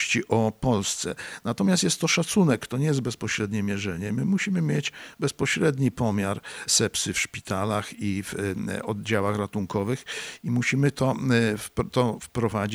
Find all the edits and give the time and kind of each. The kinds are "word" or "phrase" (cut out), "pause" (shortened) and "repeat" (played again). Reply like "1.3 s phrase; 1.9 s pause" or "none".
none

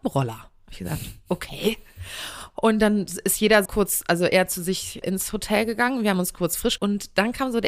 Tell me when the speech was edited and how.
3.7 s word; 5.0 s word; 6.8 s word

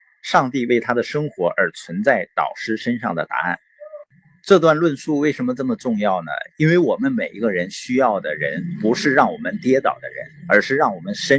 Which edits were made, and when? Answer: 10.4 s pause

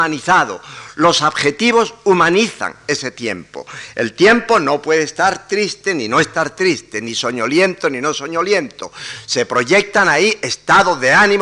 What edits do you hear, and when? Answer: none

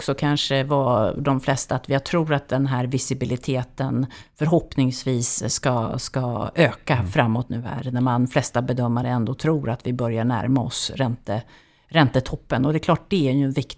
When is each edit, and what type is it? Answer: none

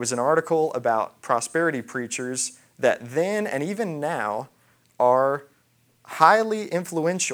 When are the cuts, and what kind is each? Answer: none

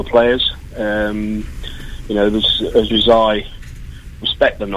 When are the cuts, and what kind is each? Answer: 2.9 s word

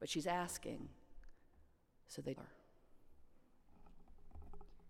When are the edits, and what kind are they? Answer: 2.4 s word

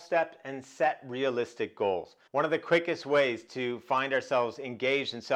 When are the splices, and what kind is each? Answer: 2.3 s pause

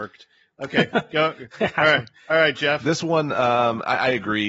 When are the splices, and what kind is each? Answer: none

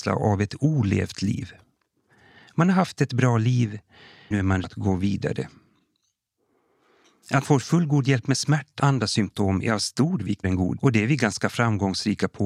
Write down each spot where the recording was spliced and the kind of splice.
4.3 s word; 4.6 s word; 7.4 s word; 8.8 s word; 10.4 s word; 10.8 s word

